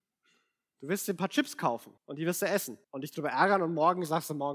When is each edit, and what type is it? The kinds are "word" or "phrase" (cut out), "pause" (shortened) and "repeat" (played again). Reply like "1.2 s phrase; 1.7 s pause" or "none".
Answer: 2.0 s pause; 2.8 s pause